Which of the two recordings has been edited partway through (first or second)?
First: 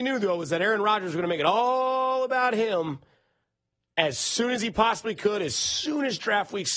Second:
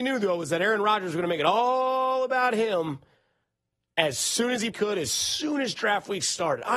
second